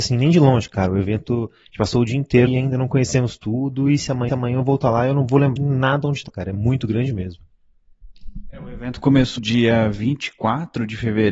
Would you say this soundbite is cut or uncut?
cut